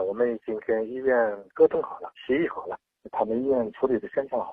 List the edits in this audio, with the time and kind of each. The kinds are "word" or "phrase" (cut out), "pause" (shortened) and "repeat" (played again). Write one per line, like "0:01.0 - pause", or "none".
0:02.2 - pause